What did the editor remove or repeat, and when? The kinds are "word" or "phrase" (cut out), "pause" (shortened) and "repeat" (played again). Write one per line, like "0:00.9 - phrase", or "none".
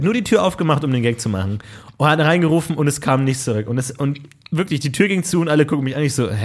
none